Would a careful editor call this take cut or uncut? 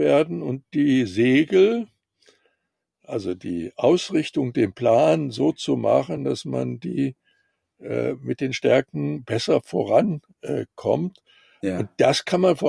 uncut